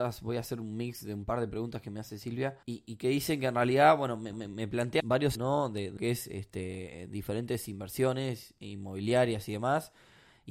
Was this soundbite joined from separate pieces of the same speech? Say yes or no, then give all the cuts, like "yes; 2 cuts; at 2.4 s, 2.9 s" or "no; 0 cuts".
yes; 5 cuts; at 2.6 s, 4.3 s, 5.0 s, 5.3 s, 6.0 s